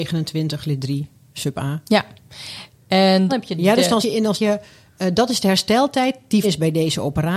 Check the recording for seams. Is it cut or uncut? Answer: cut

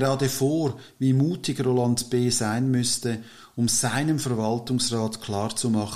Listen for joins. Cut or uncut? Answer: uncut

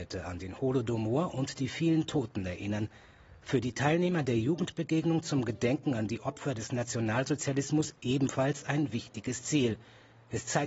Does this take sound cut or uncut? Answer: uncut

